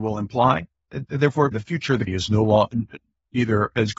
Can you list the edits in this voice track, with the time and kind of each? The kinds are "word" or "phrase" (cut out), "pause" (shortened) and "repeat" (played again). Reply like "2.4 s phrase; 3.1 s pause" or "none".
1.5 s word; 2.1 s word